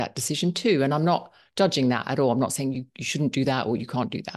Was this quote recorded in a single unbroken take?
yes; 0 cuts

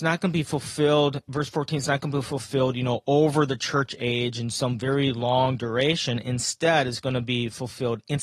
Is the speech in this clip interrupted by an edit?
no; 0 cuts

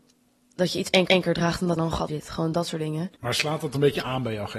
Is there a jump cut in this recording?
yes; 4 cuts; at 1.1 s, 1.8 s, 2.1 s, 3.1 s

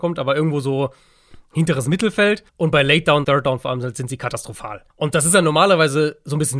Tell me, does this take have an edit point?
yes; 3 cuts; at 2.5 s, 3.2 s, 4.9 s

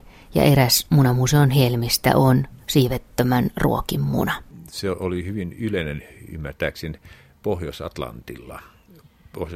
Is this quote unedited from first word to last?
yes; 0 cuts

